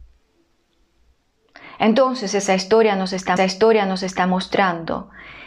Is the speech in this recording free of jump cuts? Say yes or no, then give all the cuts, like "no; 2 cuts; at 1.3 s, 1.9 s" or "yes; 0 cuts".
no; 1 cut; at 3.4 s